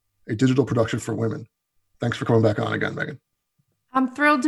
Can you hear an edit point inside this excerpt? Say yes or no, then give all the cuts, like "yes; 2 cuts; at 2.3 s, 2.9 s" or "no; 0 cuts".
no; 0 cuts